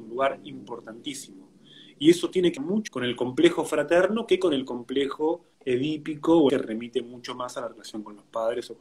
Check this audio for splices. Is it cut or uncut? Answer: cut